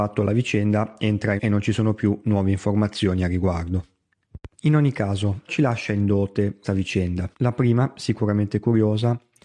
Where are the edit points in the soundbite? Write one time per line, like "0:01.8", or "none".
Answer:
0:01.4
0:04.5
0:05.5
0:06.6
0:07.3